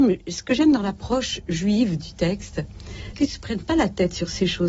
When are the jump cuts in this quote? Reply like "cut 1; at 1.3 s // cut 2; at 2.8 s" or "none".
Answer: cut 1; at 3.1 s